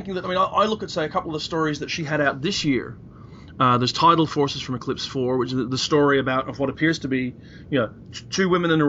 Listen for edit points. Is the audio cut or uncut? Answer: uncut